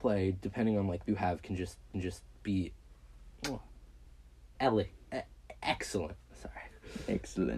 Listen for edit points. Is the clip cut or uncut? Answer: cut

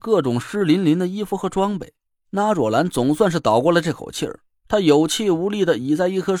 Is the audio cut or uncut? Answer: cut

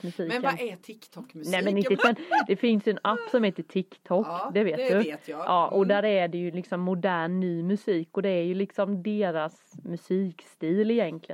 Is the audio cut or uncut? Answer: cut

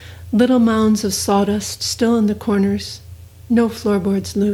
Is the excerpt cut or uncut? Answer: uncut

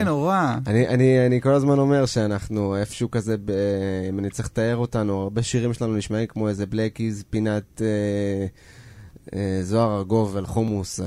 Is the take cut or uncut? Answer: uncut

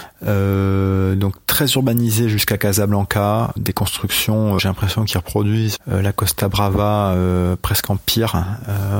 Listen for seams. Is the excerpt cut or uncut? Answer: cut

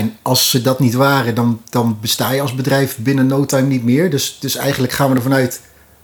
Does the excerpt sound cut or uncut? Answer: uncut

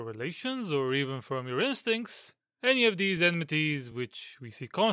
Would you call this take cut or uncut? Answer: uncut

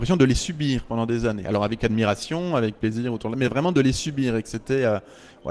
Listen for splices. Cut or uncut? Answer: uncut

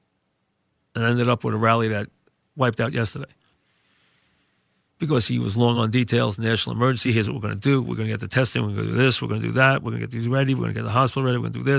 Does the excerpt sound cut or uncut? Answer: uncut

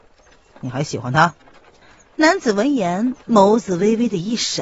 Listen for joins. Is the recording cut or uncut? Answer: cut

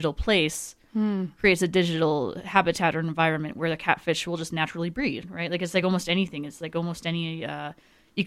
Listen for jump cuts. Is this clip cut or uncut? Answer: uncut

